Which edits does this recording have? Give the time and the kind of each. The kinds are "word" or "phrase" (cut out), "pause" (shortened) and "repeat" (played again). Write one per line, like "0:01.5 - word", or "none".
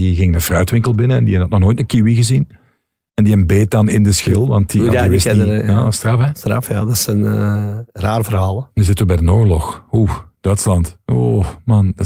none